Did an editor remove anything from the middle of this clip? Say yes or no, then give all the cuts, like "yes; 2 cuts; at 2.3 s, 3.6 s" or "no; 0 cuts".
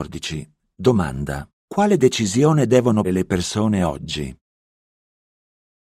yes; 2 cuts; at 1.6 s, 3.0 s